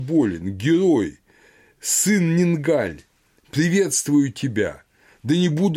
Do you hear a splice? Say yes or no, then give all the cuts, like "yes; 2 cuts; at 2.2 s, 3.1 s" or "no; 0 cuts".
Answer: no; 0 cuts